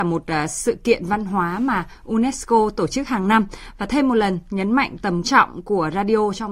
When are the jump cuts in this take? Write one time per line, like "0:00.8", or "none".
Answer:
0:05.2